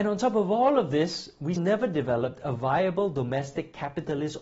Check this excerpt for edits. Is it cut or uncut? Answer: cut